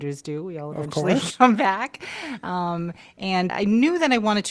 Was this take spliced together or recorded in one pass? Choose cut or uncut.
cut